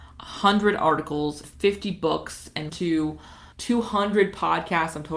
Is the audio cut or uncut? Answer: cut